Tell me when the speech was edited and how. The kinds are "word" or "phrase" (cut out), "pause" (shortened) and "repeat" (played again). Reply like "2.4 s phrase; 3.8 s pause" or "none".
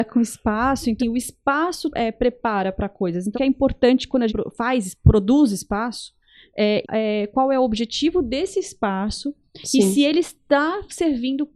1.0 s word; 1.9 s word; 3.3 s word; 4.3 s word; 6.8 s word